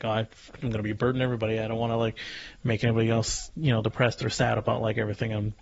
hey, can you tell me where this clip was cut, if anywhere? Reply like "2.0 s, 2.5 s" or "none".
none

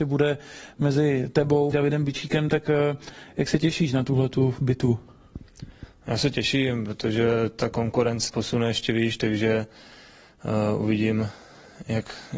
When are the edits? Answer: 1.7 s, 8.3 s

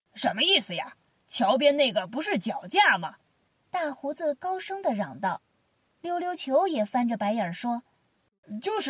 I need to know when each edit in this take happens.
5.5 s

